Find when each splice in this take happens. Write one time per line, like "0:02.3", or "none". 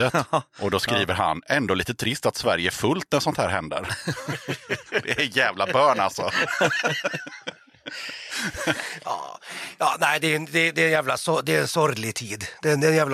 none